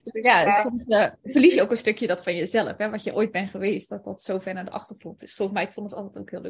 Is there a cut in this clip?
no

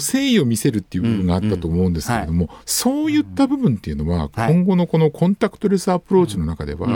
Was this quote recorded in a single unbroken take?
no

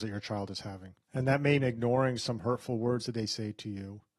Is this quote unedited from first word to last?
no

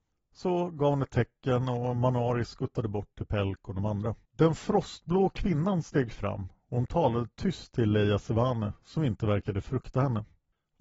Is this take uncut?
no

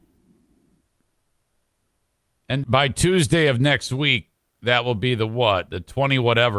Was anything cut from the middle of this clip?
yes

